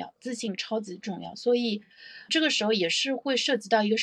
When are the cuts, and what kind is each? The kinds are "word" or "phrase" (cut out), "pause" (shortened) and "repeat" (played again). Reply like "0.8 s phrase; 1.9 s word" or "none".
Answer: 2.3 s word